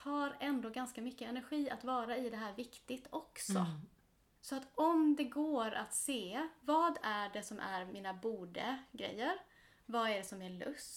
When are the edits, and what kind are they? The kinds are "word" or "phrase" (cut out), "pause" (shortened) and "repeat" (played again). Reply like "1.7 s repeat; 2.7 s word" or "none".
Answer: none